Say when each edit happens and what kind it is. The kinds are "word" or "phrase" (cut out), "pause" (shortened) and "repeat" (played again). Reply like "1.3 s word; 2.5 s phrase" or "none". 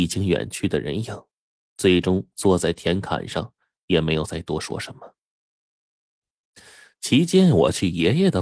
none